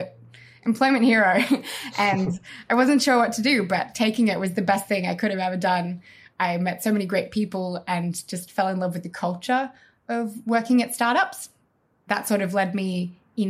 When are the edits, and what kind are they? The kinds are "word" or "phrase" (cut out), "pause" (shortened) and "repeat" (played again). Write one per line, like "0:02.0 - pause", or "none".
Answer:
none